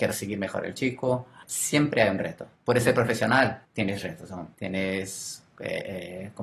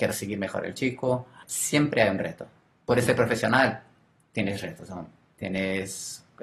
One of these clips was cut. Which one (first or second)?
first